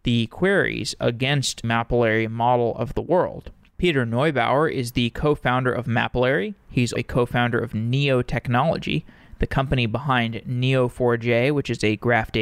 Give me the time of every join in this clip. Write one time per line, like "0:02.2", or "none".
0:01.6
0:07.0